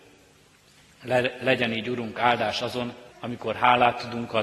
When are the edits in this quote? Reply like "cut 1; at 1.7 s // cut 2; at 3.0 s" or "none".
cut 1; at 3.1 s